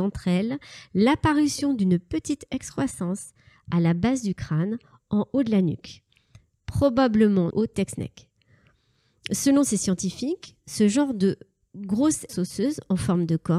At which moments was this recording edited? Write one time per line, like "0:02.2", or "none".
0:07.5
0:12.3